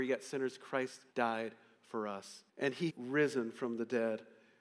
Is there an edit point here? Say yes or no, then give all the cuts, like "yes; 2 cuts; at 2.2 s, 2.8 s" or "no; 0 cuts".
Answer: yes; 3 cuts; at 1.1 s, 2.5 s, 2.9 s